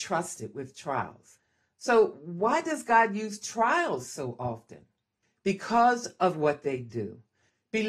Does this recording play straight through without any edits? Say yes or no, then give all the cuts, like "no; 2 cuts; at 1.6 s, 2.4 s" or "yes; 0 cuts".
yes; 0 cuts